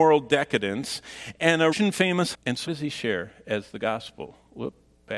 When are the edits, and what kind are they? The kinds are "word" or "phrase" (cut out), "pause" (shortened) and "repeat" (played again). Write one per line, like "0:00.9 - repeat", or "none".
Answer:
0:01.7 - word
0:02.3 - word
0:02.7 - word